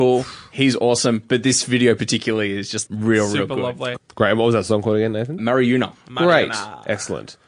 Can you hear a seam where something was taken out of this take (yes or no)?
yes